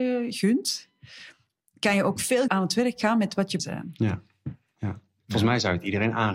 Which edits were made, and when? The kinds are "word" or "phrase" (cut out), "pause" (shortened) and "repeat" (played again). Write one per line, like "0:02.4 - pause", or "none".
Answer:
0:02.5 - word
0:03.6 - word